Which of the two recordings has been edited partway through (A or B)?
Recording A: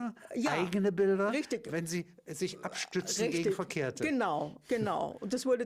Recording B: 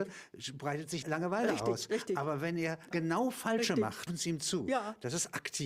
B